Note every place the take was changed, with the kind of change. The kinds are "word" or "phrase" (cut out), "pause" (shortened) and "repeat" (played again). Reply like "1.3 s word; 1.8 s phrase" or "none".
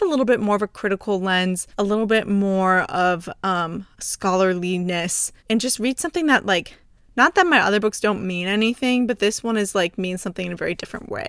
1.7 s pause; 5.4 s pause; 6.8 s pause